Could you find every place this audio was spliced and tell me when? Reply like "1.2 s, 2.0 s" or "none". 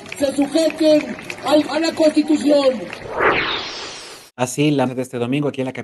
1.6 s, 4.3 s, 4.9 s